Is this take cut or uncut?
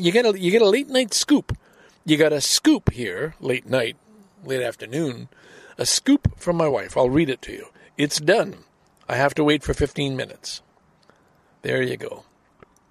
uncut